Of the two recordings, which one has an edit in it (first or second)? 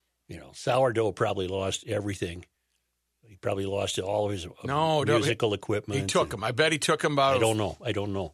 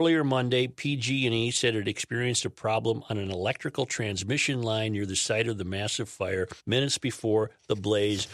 second